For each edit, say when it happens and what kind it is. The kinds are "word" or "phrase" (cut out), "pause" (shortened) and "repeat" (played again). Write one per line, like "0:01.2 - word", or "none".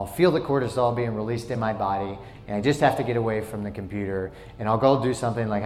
none